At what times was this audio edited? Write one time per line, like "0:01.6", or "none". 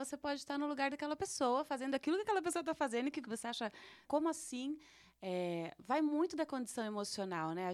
0:03.2
0:04.0